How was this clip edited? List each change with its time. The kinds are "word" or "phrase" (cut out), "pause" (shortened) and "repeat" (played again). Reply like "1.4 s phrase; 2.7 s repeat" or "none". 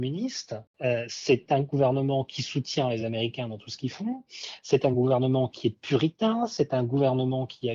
none

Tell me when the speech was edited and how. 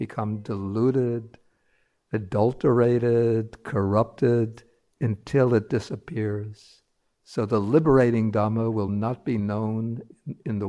none

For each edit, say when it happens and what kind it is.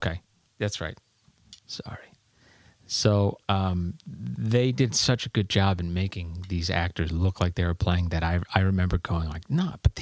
1.6 s pause; 3.4 s pause

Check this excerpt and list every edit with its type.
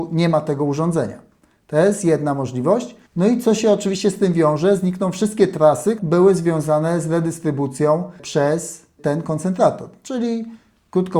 3.1 s pause; 6.0 s word

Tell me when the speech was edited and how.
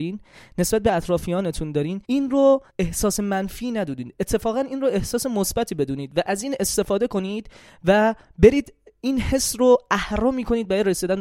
2.0 s pause; 2.7 s pause

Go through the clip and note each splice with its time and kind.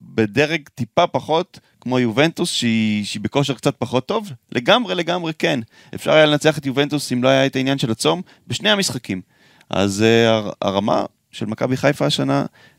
none

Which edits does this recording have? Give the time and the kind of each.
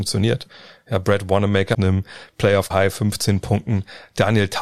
1.7 s word; 2.7 s word

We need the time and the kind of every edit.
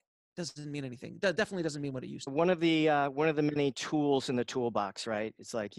2.3 s phrase

